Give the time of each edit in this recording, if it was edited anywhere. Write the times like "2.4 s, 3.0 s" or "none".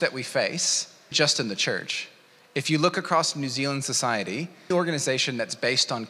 1.1 s, 4.7 s